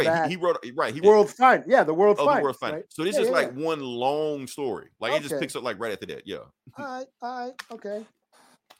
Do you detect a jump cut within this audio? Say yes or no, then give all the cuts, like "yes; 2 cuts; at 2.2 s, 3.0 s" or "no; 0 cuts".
yes; 2 cuts; at 1.0 s, 4.9 s